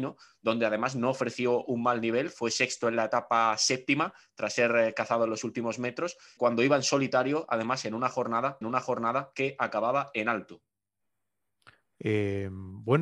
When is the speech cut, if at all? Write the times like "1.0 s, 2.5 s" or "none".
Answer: 6.4 s, 8.6 s